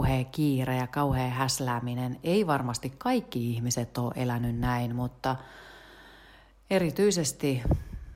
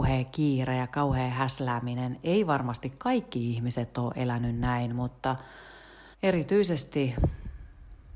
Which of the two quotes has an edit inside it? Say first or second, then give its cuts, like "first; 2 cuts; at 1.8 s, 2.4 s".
second; 1 cut; at 6.1 s